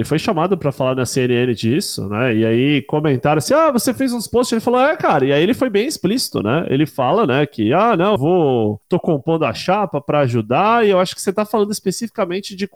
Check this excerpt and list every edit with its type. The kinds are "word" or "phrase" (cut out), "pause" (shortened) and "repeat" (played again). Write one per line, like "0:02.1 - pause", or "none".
0:08.2 - word